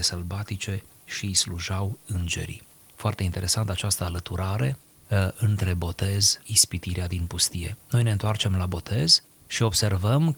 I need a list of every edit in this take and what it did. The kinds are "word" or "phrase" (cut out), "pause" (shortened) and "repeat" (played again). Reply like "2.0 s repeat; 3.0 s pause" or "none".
6.4 s word